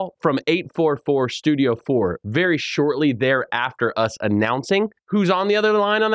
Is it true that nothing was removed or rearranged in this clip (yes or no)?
no